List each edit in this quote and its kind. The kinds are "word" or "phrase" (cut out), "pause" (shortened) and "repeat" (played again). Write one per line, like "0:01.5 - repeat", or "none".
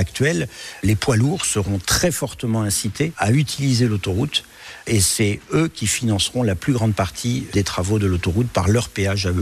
none